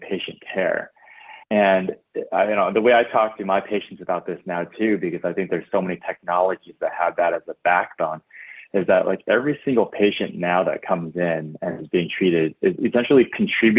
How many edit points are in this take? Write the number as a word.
one